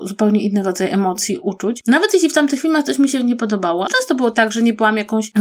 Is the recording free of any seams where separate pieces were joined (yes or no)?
no